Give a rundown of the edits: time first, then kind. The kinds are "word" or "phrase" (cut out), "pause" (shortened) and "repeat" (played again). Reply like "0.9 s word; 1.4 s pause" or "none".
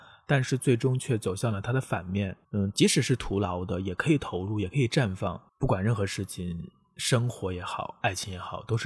2.4 s pause; 5.5 s pause